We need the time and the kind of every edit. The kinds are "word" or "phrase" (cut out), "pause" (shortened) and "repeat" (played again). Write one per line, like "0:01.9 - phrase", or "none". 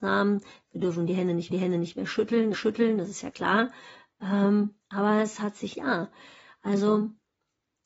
0:01.5 - repeat
0:02.5 - repeat
0:03.3 - word
0:04.8 - pause
0:05.7 - phrase